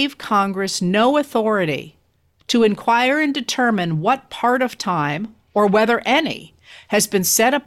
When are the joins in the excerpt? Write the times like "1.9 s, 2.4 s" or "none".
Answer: none